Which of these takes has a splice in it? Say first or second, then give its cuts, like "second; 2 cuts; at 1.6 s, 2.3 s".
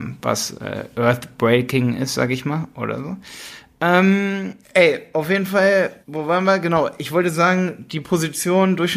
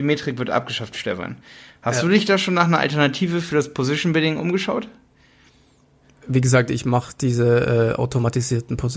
first; 2 cuts; at 4.6 s, 6.0 s